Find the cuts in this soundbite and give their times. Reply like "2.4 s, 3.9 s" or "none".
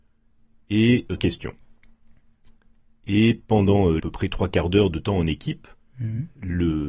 1.2 s, 4.0 s

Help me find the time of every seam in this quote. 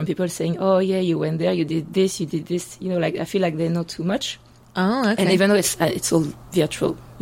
none

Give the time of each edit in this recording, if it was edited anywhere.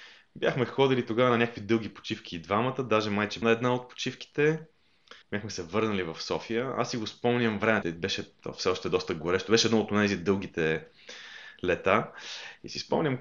3.4 s, 5.2 s, 7.8 s

